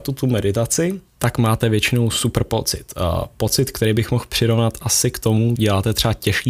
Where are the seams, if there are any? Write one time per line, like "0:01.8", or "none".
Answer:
0:05.6